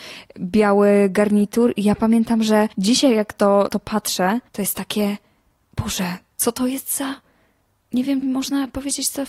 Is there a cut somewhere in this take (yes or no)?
yes